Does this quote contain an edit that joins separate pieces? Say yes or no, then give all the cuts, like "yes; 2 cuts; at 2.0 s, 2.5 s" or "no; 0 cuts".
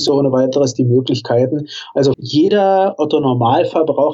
yes; 1 cut; at 2.1 s